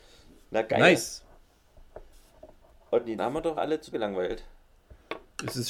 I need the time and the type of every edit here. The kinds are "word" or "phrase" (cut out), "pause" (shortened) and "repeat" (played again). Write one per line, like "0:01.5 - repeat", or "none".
0:03.2 - word
0:03.6 - word
0:03.9 - word